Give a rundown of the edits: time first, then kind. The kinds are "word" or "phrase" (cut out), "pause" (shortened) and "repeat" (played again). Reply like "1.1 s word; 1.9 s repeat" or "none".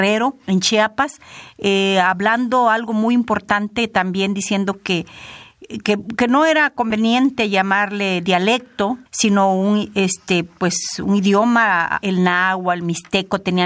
9.1 s pause